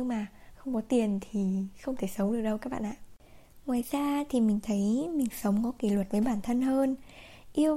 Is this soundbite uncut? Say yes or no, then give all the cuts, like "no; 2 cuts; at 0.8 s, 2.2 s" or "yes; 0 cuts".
yes; 0 cuts